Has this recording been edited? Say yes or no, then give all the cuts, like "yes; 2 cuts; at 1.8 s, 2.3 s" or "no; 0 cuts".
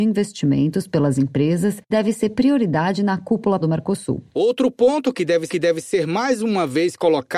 yes; 3 cuts; at 1.9 s, 3.6 s, 5.5 s